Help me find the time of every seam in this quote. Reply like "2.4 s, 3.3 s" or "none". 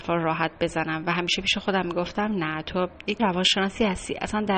3.2 s